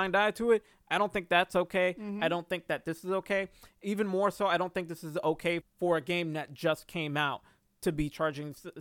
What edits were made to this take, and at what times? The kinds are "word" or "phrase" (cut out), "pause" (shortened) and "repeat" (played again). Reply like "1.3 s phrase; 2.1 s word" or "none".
5.6 s word

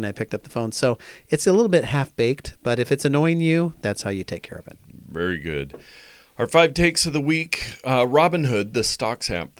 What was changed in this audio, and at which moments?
none

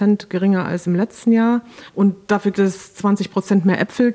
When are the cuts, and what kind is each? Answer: 1.9 s pause; 2.5 s word

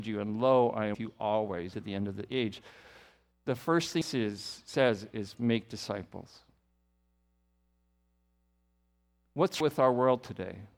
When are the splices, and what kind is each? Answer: 0.9 s word; 1.7 s word; 4.0 s word; 9.6 s word

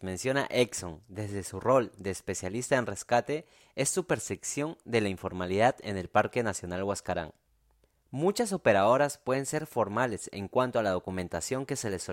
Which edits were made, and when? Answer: none

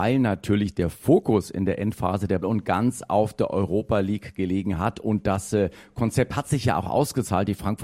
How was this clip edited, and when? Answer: 2.4 s phrase

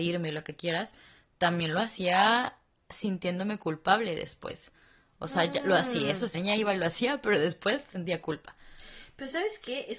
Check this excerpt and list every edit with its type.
6.3 s word

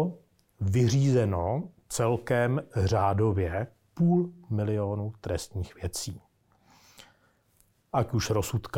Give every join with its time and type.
none

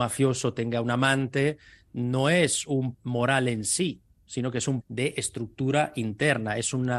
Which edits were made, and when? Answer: 2.9 s word; 4.8 s word

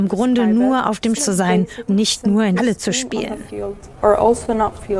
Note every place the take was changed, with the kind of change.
1.2 s word; 1.9 s word; 2.6 s word

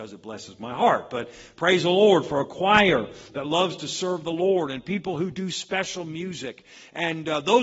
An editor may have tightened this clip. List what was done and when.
none

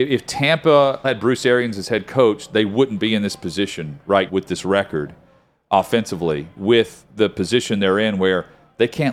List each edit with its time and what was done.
1.0 s word; 4.3 s word; 6.6 s word

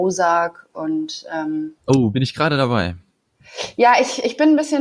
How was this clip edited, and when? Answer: 1.8 s pause

